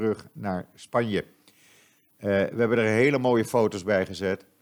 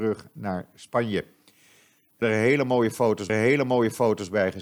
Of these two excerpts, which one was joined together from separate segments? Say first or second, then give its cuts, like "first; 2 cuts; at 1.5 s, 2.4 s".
second; 2 cuts; at 2.2 s, 3.3 s